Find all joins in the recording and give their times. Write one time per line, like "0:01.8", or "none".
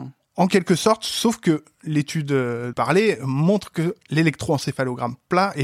0:02.7